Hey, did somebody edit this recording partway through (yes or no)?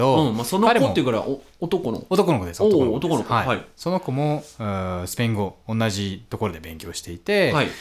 no